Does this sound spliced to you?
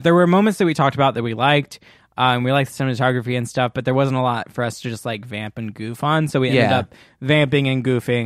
no; 0 cuts

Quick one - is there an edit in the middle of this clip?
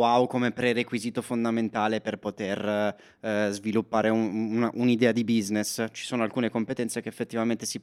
no; 0 cuts

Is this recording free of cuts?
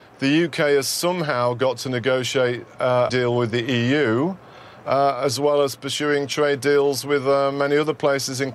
no; 1 cut; at 3.1 s

